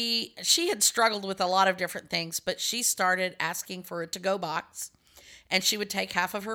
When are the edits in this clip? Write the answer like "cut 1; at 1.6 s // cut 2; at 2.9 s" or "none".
none